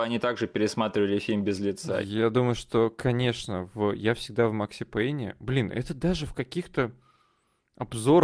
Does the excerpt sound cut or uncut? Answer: uncut